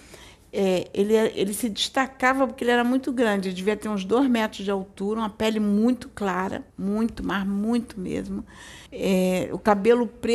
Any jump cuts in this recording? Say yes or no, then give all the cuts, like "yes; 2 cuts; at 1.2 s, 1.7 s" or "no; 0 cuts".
yes; 2 cuts; at 6.7 s, 8.9 s